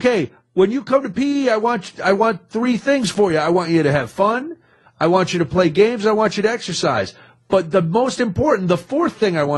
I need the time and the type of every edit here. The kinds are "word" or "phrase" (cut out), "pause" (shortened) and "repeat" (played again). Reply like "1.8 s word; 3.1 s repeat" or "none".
none